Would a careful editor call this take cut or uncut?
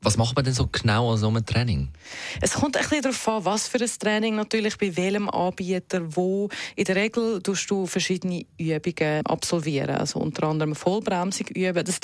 uncut